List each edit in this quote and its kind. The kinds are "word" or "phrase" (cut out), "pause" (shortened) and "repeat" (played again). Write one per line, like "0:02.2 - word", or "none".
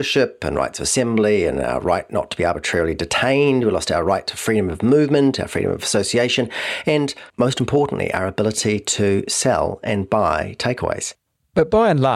0:07.3 - pause